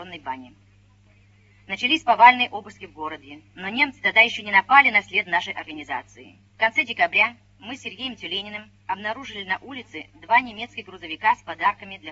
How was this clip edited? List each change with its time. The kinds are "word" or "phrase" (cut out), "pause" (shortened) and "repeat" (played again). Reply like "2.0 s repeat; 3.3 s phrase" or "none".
3.5 s pause; 6.5 s pause